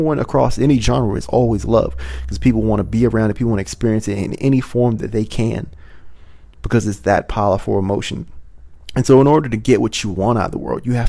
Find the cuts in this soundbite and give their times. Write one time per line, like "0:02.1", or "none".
none